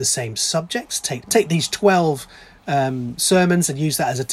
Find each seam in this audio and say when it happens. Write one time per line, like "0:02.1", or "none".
0:01.2